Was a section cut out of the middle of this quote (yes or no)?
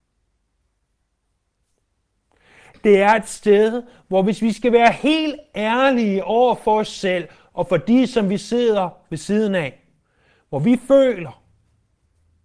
no